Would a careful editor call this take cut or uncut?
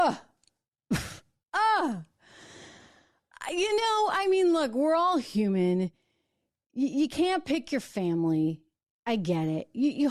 uncut